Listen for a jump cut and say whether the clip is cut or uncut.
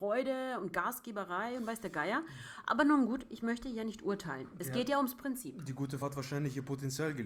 cut